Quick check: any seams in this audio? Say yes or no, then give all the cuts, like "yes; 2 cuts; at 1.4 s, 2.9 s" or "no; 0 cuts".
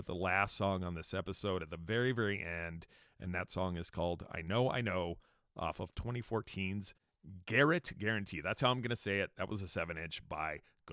no; 0 cuts